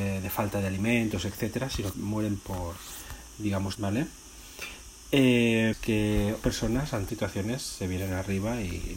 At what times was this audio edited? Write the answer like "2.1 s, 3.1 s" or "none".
1.9 s, 2.4 s, 3.7 s, 5.7 s, 6.4 s, 7.1 s